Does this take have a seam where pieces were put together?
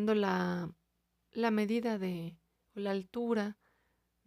no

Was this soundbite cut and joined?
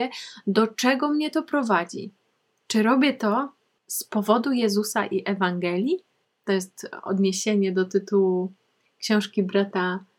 no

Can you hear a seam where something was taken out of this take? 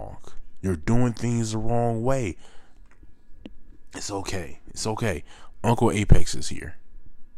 no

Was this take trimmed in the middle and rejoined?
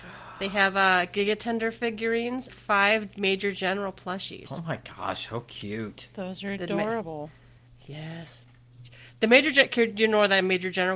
yes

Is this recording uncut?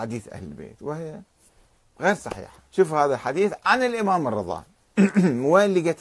no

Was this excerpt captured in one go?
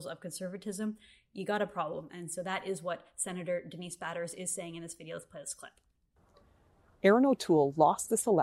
yes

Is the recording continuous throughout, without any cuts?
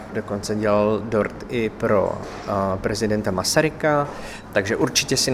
yes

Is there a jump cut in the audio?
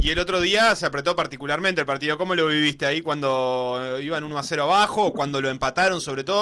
no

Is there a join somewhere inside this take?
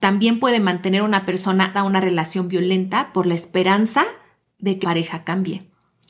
yes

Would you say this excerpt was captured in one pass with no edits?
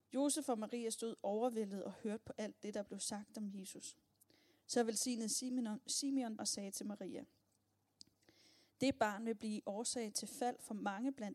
no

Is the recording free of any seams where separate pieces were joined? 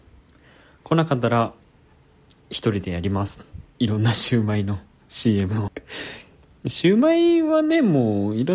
no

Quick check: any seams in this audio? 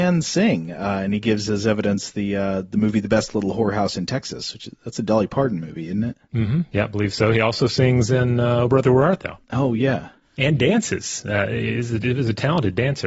yes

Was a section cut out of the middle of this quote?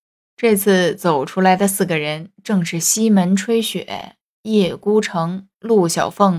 no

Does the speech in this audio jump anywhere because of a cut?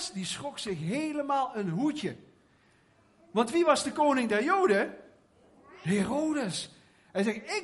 no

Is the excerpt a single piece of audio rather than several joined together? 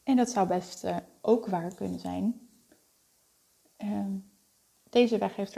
yes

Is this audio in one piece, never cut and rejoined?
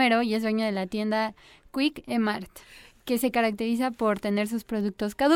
yes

